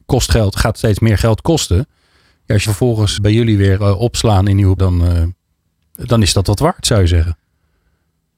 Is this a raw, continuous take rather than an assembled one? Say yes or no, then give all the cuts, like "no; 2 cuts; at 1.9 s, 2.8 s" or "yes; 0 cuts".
no; 3 cuts; at 2.7 s, 3.2 s, 4.8 s